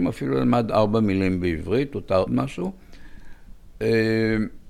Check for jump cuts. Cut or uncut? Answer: cut